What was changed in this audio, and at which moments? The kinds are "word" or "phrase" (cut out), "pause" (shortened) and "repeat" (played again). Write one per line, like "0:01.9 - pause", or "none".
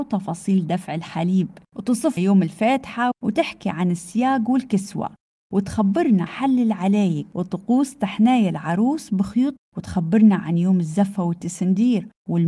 0:02.2 - word
0:03.1 - word
0:06.3 - word
0:09.6 - word